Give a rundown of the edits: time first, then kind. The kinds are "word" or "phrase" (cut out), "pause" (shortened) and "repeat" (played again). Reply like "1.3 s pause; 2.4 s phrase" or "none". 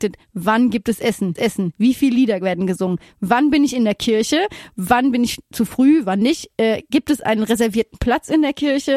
1.4 s repeat